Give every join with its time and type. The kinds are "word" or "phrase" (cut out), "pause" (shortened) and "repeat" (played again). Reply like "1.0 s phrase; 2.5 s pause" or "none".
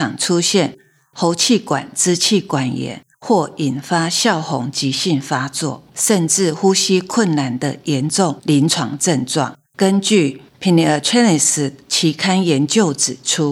3.1 s pause; 5.9 s pause; 9.7 s pause; 10.5 s pause